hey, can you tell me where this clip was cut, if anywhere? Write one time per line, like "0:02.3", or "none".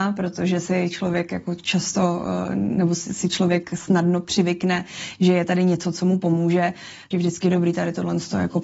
0:07.1